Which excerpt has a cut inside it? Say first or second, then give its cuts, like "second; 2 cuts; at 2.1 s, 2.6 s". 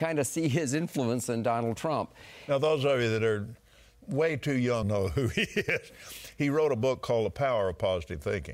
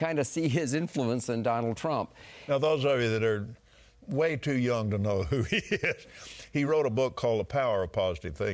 first; 1 cut; at 4.8 s